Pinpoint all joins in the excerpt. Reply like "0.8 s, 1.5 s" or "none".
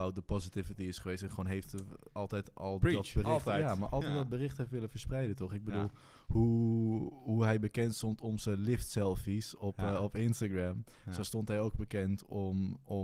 none